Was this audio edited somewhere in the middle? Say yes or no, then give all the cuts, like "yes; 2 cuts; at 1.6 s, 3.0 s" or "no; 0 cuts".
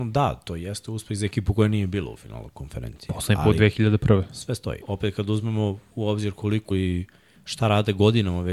yes; 2 cuts; at 4.8 s, 6.7 s